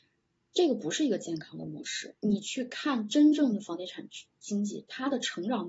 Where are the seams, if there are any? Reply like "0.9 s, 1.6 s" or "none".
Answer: 2.2 s